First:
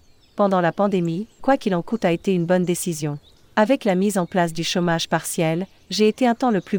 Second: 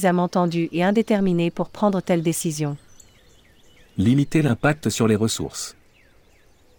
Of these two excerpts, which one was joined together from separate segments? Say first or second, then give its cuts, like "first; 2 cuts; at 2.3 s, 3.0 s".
first; 1 cut; at 1.4 s